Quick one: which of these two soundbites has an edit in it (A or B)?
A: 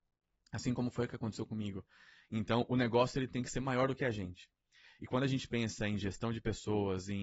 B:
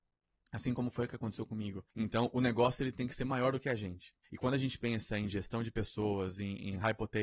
B